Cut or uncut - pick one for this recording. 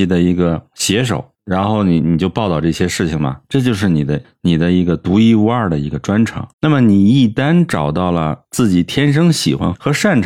cut